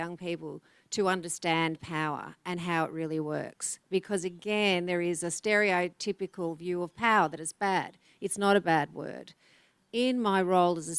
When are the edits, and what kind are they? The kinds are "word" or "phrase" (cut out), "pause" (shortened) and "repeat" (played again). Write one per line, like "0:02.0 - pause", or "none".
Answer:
none